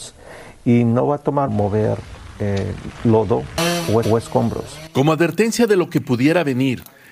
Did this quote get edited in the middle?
yes; 2 cuts; at 1.5 s, 4.0 s

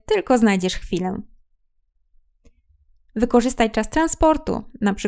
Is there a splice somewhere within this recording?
no; 0 cuts

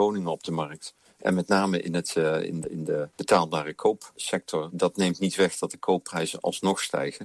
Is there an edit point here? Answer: no; 0 cuts

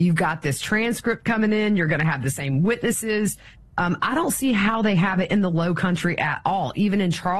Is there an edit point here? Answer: no; 0 cuts

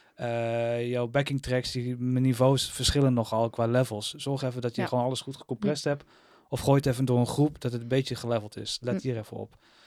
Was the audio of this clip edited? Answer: no; 0 cuts

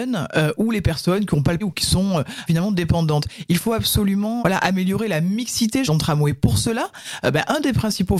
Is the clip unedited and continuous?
no; 4 cuts; at 1.6 s, 2.5 s, 4.4 s, 5.9 s

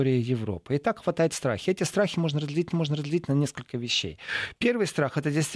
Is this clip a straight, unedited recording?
no; 1 cut; at 2.7 s

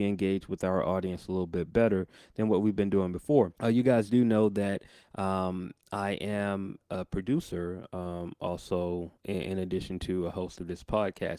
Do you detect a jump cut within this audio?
yes; 3 cuts; at 3.6 s, 5.8 s, 9.2 s

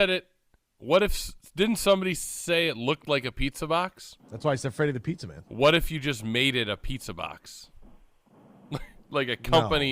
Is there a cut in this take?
yes; 1 cut; at 4.2 s

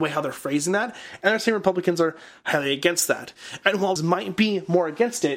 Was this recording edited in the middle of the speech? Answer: yes; 1 cut; at 4.0 s

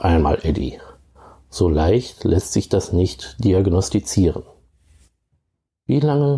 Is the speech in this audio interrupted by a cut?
no; 0 cuts

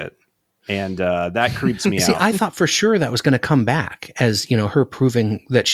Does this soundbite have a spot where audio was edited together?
no; 0 cuts

